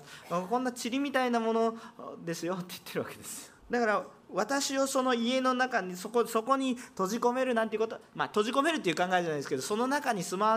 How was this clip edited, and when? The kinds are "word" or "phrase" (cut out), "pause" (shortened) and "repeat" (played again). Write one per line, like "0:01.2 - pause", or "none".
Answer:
0:03.6 - pause